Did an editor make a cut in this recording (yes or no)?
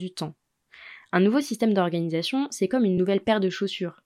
no